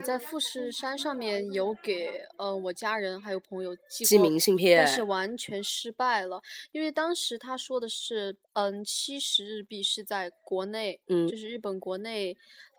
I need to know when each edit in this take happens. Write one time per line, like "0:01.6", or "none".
0:08.4

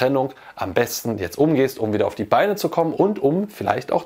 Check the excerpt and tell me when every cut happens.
0:02.9

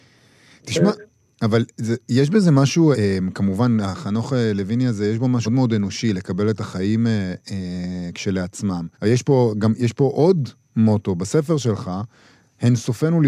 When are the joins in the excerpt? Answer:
0:02.9
0:05.4
0:08.9

